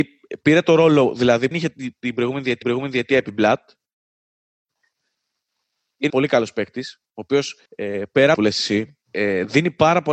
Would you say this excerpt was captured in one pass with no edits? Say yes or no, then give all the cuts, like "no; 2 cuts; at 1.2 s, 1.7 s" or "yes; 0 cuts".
no; 6 cuts; at 1.5 s, 2.6 s, 6.1 s, 7.7 s, 8.3 s, 9.0 s